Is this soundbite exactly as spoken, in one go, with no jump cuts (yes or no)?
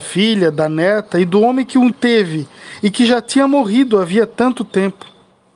no